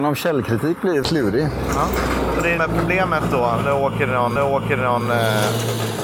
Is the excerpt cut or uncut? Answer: cut